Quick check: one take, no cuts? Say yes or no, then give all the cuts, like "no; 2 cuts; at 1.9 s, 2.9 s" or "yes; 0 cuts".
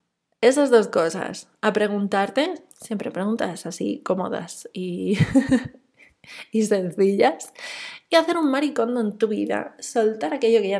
no; 2 cuts; at 2.7 s, 9.8 s